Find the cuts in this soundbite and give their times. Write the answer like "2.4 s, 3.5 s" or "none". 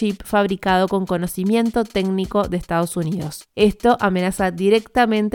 none

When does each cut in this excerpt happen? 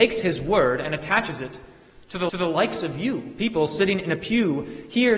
2.3 s

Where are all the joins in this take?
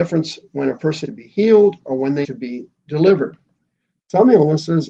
1.0 s, 2.2 s

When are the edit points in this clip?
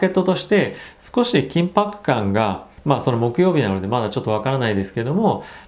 2.8 s

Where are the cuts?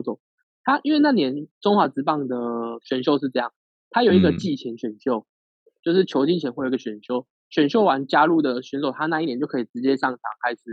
none

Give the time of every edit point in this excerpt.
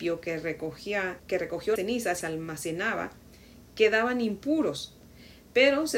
1.2 s, 1.8 s, 2.2 s

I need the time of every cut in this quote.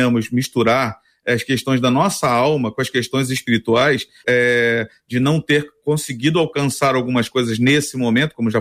4.2 s

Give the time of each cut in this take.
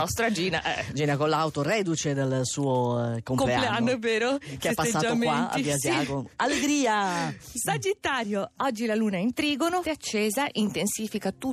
9.8 s

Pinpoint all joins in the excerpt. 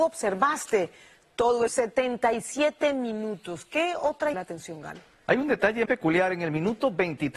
1.7 s, 4.3 s, 5.9 s

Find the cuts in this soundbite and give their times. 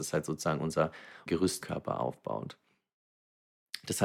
1.3 s, 1.6 s

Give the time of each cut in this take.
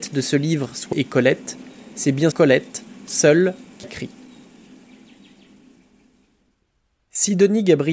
0.9 s, 2.3 s, 3.8 s

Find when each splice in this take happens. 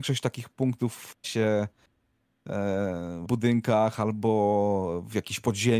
1.2 s, 3.2 s

